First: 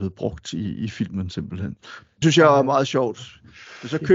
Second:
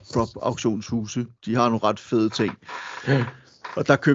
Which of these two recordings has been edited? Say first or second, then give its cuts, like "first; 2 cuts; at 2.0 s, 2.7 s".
first; 1 cut; at 2.2 s